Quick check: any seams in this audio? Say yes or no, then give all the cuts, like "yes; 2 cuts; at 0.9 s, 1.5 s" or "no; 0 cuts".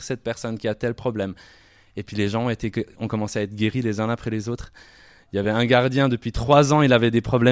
no; 0 cuts